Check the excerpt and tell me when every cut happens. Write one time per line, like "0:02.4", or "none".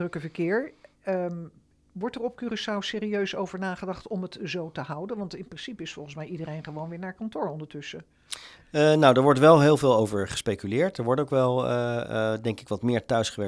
none